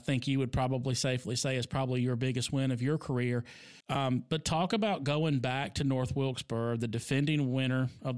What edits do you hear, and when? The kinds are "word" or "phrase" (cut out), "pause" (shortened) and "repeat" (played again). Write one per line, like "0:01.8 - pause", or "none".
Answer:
0:03.8 - pause